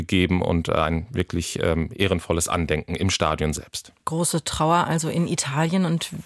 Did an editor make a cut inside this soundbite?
yes; 1 cut; at 4.0 s

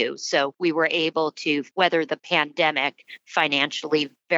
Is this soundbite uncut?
yes; 0 cuts

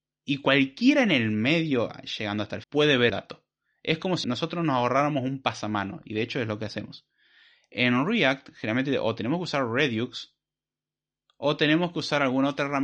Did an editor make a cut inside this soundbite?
yes; 3 cuts; at 2.6 s, 3.1 s, 4.2 s

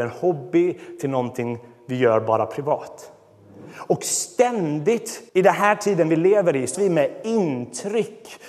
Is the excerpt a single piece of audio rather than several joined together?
no; 2 cuts; at 5.3 s, 6.7 s

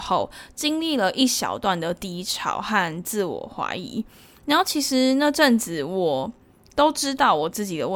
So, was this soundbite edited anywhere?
no; 0 cuts

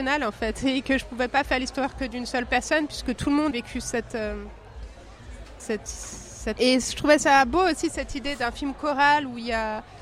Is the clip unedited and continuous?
no; 3 cuts; at 3.5 s, 5.6 s, 6.6 s

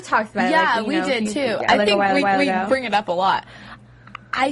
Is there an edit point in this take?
yes; 1 cut; at 2.2 s

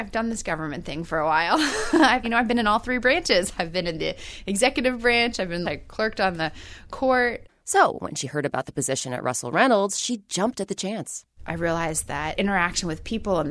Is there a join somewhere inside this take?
yes; 3 cuts; at 2.2 s, 5.6 s, 12.4 s

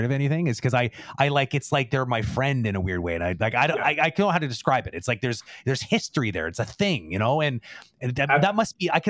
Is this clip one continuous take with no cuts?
yes; 0 cuts

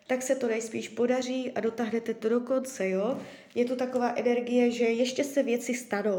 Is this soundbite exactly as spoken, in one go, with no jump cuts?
yes; 0 cuts

